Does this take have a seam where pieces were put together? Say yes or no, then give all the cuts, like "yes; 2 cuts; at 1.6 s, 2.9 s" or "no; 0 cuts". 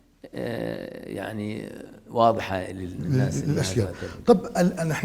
no; 0 cuts